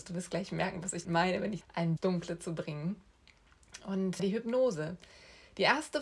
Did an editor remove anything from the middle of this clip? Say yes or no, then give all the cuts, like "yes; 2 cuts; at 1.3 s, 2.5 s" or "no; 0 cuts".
yes; 4 cuts; at 1.0 s, 1.6 s, 2.0 s, 4.2 s